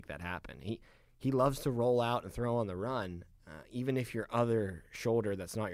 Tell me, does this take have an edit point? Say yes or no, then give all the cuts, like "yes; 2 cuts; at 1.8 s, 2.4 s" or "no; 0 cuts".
no; 0 cuts